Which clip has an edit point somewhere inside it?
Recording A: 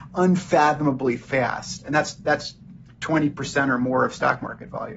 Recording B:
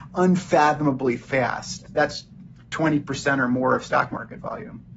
B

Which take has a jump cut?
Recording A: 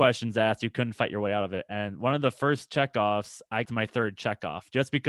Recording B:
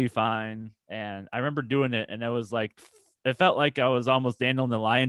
A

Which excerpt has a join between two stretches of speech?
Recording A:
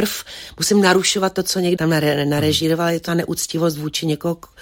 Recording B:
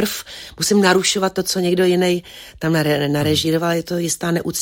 A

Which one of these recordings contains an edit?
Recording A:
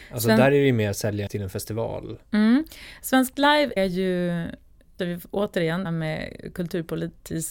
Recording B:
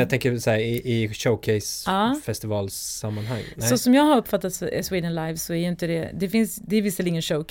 A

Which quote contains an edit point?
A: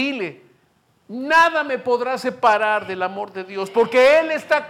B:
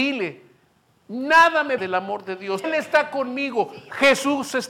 B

